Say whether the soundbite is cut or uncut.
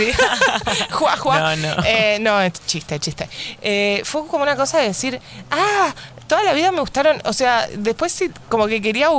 uncut